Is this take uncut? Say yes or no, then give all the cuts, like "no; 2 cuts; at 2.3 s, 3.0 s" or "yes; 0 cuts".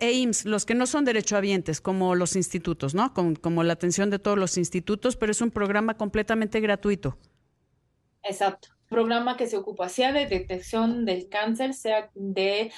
no; 1 cut; at 8.9 s